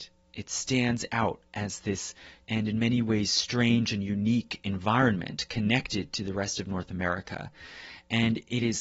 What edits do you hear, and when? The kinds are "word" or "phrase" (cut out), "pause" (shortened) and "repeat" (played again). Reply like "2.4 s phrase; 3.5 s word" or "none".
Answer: 2.4 s word